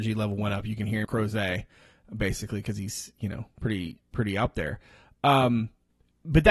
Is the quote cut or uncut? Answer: cut